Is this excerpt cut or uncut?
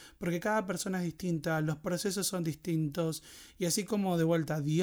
uncut